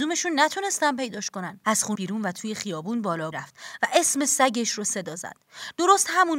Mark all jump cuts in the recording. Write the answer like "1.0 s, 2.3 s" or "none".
1.6 s, 1.9 s, 3.3 s